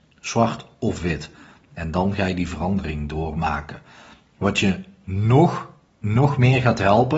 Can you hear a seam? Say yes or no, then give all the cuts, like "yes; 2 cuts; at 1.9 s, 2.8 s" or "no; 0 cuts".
no; 0 cuts